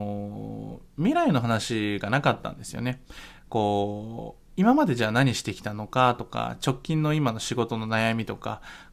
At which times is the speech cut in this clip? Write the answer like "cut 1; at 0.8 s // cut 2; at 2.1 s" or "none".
cut 1; at 4.5 s